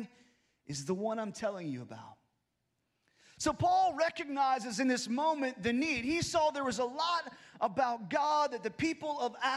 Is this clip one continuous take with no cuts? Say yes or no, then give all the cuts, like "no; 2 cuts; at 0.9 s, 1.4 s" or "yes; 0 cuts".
yes; 0 cuts